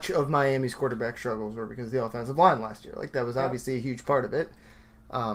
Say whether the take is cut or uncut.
uncut